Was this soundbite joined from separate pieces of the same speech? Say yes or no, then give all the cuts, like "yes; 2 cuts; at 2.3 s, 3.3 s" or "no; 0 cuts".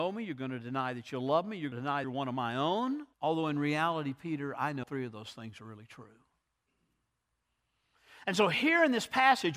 yes; 4 cuts; at 1.7 s, 2.0 s, 3.1 s, 4.8 s